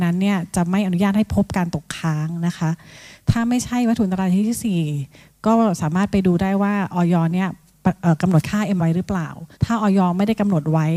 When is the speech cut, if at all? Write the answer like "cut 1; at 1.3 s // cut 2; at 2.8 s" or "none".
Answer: cut 1; at 8.8 s // cut 2; at 9.5 s